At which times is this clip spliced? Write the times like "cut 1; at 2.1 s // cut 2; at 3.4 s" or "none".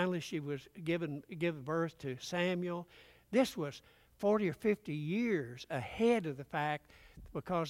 none

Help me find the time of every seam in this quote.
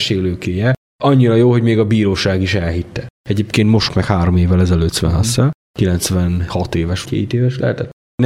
cut 1; at 3.1 s // cut 2; at 3.9 s // cut 3; at 7.1 s

